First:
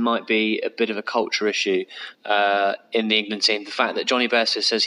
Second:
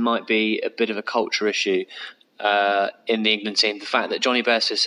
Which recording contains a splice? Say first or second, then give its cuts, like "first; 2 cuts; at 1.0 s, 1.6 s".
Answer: first; 1 cut; at 2.1 s